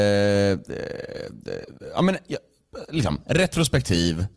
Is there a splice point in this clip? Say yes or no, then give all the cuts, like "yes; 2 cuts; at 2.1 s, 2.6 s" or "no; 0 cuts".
no; 0 cuts